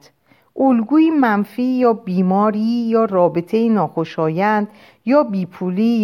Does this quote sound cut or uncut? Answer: uncut